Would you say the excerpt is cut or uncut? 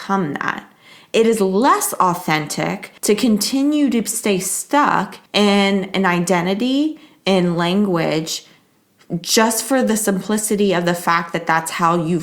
cut